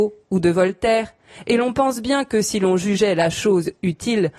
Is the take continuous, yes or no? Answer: yes